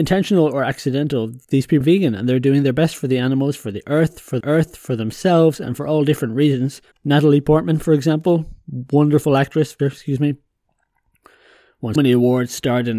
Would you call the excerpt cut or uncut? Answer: cut